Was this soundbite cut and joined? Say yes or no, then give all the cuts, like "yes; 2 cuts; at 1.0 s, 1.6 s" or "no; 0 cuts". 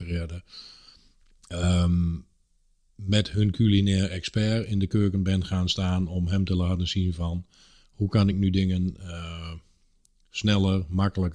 no; 0 cuts